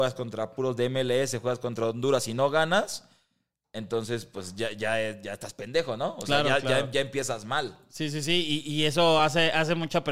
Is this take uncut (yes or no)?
yes